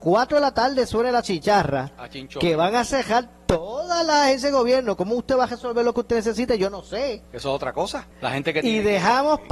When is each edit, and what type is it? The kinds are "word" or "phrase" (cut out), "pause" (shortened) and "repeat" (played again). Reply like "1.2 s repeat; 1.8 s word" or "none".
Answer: 7.2 s pause; 8.1 s pause